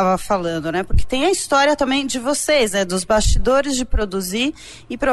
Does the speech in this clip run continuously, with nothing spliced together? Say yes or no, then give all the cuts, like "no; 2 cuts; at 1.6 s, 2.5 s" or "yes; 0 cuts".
yes; 0 cuts